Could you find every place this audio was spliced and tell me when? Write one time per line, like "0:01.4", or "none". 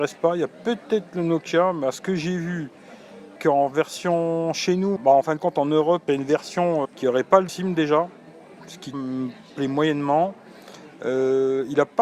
0:03.4
0:05.0
0:06.1
0:06.8
0:07.5
0:08.9